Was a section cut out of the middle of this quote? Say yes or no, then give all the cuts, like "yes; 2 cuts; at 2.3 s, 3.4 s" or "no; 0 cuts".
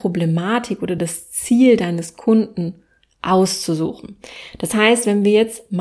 no; 0 cuts